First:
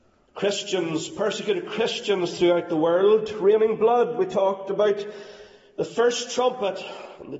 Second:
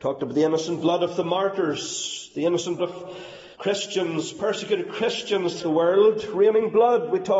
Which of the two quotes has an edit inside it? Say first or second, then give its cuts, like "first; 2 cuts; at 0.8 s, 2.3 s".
second; 3 cuts; at 2.8 s, 3.5 s, 5.6 s